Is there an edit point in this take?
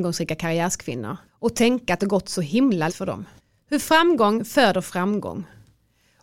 yes; 4 cuts; at 1.3 s, 2.0 s, 2.9 s, 3.4 s

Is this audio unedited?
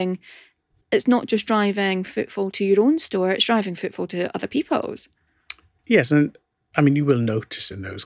yes; 0 cuts

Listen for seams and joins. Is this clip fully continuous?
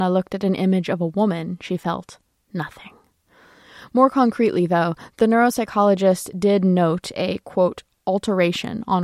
yes; 0 cuts

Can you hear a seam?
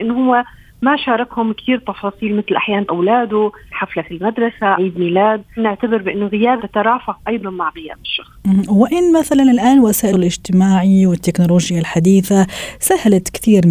yes; 6 cuts; at 2.9 s, 3.7 s, 4.8 s, 5.6 s, 6.6 s, 10.1 s

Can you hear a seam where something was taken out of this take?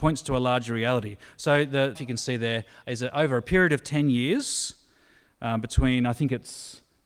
yes; 1 cut; at 2.0 s

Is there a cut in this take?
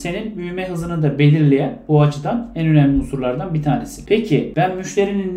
no; 0 cuts

